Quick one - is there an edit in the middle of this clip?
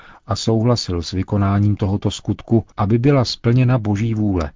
yes; 1 cut; at 2.7 s

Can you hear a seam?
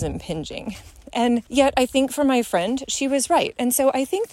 yes; 1 cut; at 1.5 s

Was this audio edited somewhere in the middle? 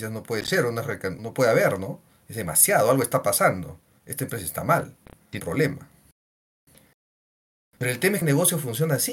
yes; 3 cuts; at 1.2 s, 5.4 s, 8.2 s

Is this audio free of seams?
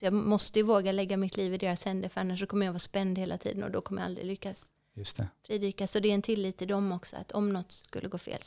yes; 0 cuts

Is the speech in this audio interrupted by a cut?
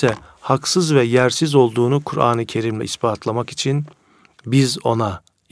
no; 0 cuts

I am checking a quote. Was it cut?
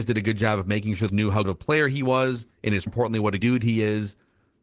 yes; 5 cuts; at 1.1 s, 1.4 s, 2.5 s, 2.9 s, 3.4 s

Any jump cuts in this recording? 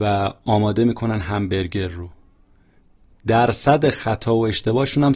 no; 0 cuts

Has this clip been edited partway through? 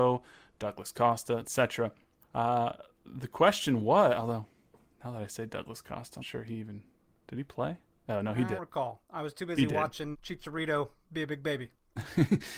yes; 5 cuts; at 2.2 s, 6.2 s, 7.8 s, 8.6 s, 10.1 s

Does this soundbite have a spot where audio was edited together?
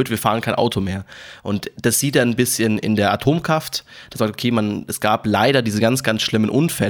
no; 0 cuts

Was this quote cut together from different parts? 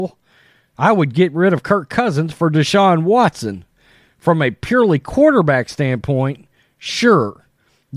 no; 0 cuts

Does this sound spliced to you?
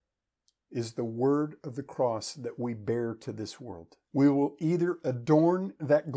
yes; 1 cut; at 4.0 s

